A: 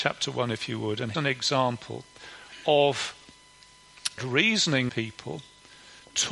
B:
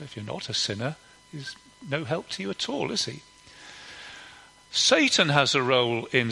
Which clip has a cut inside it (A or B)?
A